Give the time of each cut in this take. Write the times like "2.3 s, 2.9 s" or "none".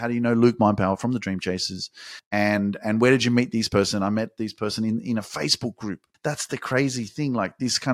none